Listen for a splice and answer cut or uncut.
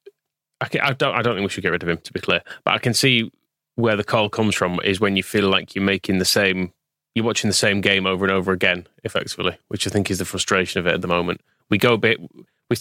uncut